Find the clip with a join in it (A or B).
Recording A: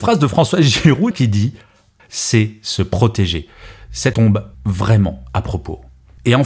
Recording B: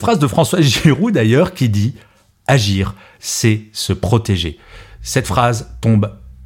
A